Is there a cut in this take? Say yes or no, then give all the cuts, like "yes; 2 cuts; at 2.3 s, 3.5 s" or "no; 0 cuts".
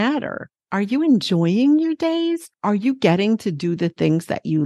no; 0 cuts